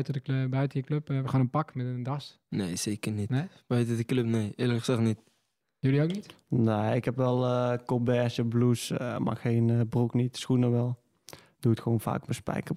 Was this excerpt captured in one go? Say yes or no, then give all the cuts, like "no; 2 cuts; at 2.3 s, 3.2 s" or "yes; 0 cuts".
yes; 0 cuts